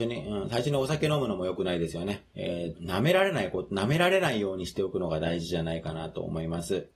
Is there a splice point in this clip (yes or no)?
yes